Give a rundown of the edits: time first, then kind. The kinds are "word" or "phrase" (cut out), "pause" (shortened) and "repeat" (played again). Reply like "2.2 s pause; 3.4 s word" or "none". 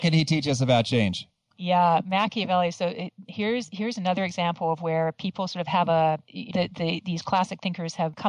6.5 s word